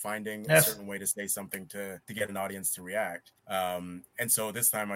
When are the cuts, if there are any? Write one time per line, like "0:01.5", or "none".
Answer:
0:02.0
0:03.4